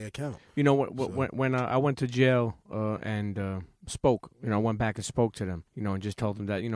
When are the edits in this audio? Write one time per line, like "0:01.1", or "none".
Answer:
0:04.3
0:05.7